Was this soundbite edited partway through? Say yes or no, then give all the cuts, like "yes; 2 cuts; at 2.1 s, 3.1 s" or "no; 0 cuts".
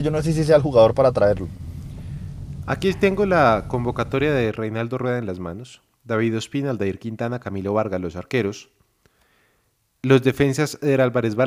no; 0 cuts